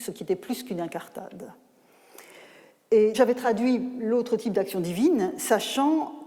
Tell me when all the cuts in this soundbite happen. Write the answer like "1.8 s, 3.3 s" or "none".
3.1 s